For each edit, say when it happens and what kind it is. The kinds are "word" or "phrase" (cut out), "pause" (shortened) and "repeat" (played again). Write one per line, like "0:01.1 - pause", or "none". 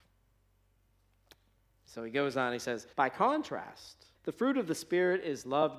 0:02.9 - pause
0:04.1 - pause